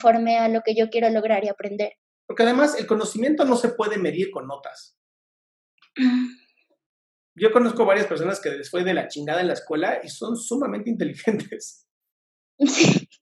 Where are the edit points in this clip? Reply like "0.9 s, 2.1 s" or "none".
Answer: 2.0 s